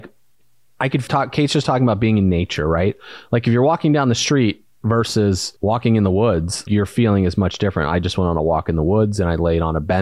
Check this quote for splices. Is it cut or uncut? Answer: cut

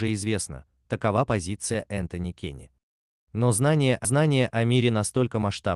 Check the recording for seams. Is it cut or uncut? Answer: cut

